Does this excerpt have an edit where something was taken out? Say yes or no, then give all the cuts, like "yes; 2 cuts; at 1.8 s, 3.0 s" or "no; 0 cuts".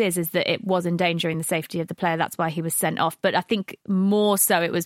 no; 0 cuts